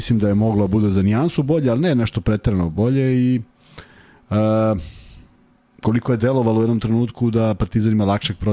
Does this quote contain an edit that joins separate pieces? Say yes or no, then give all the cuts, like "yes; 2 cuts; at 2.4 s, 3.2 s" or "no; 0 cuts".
no; 0 cuts